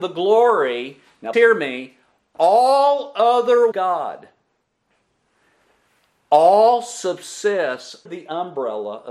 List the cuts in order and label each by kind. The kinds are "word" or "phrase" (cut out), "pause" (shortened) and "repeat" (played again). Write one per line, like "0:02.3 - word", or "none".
0:01.3 - word
0:03.7 - phrase
0:08.1 - word